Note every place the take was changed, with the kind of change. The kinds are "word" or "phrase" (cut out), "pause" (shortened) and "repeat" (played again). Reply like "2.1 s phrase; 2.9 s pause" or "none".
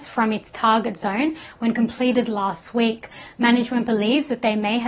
none